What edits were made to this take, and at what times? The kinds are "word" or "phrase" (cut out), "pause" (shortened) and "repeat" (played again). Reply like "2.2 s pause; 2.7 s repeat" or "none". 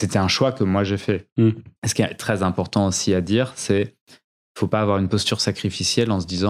1.8 s pause